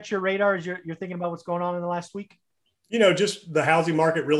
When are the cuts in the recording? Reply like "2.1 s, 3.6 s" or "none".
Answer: none